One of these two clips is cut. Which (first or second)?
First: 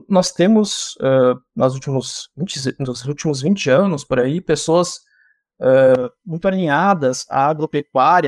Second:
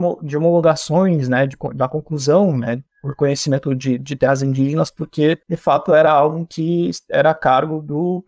second